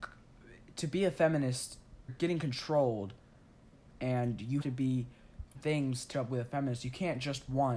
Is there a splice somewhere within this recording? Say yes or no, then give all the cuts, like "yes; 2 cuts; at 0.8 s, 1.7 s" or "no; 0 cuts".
yes; 4 cuts; at 2.1 s, 4.6 s, 5.5 s, 6.1 s